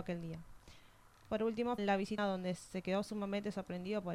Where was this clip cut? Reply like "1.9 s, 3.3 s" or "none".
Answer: 1.8 s, 2.2 s